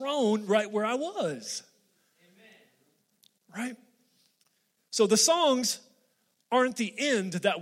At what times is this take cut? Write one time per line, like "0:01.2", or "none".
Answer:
none